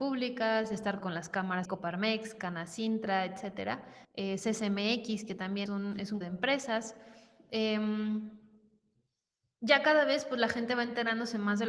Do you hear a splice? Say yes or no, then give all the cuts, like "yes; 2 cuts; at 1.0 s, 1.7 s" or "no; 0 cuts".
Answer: yes; 5 cuts; at 1.0 s, 1.7 s, 4.0 s, 5.7 s, 6.2 s